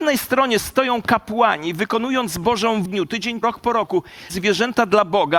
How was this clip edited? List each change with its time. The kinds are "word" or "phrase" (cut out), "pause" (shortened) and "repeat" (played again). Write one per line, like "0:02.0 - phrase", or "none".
0:02.8 - phrase
0:03.4 - phrase
0:04.3 - word